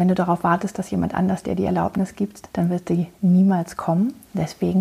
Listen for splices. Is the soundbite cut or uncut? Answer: cut